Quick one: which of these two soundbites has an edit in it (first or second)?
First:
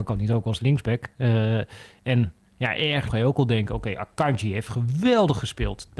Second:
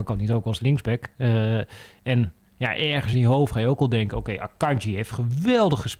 first